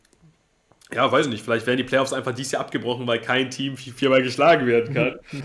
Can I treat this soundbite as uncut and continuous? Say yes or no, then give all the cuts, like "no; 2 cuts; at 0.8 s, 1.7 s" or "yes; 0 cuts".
yes; 0 cuts